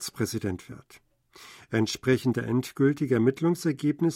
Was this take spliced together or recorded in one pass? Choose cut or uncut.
uncut